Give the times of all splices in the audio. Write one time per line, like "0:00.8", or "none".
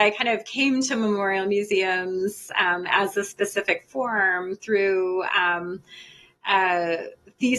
none